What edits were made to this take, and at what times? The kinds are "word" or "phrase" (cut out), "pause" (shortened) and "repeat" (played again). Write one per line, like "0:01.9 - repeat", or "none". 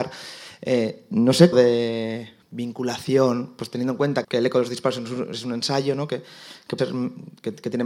0:01.5 - word
0:02.4 - pause
0:04.2 - word
0:06.8 - word